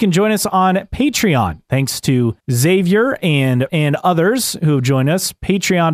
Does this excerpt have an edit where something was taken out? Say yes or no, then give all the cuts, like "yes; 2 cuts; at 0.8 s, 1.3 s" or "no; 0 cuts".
yes; 2 cuts; at 2.4 s, 3.7 s